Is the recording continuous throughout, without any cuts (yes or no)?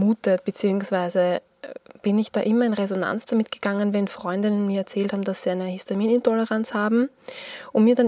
yes